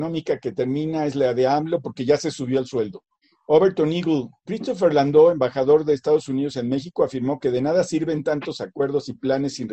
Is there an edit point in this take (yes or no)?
yes